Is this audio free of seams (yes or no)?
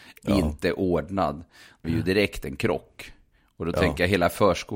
no